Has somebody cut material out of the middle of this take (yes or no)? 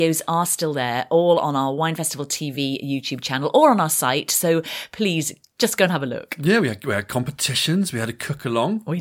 no